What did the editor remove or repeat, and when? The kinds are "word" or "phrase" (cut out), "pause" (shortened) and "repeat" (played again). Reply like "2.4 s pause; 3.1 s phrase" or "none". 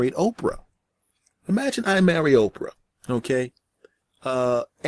none